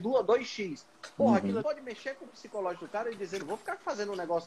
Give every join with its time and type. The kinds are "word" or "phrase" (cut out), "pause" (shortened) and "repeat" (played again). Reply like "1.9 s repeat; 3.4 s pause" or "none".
1.6 s word; 3.4 s word